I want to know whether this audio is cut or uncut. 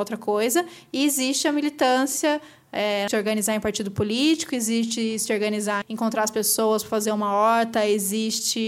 cut